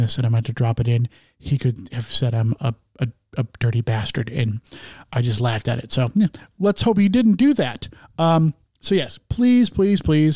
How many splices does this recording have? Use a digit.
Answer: 0